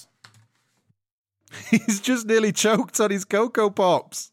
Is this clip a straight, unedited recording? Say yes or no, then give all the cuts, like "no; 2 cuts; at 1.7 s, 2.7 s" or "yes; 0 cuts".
yes; 0 cuts